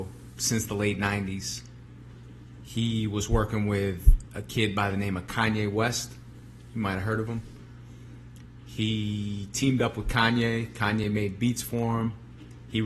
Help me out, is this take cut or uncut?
uncut